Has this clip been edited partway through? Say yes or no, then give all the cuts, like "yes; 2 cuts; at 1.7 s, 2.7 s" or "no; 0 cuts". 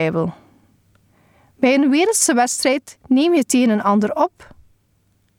yes; 1 cut; at 3.0 s